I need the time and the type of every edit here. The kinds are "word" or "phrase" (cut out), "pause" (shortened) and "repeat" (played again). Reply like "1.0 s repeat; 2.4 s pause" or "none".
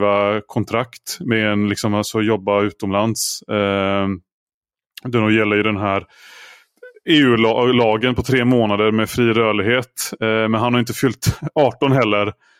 none